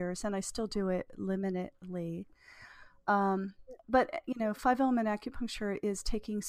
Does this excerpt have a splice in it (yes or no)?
no